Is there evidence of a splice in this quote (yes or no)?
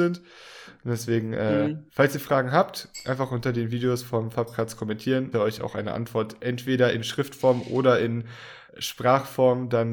yes